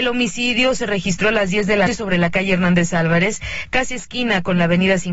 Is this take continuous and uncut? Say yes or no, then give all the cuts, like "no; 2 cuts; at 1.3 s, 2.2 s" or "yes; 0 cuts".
no; 1 cut; at 1.9 s